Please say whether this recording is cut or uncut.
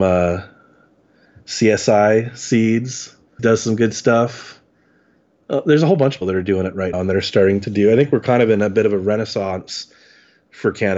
cut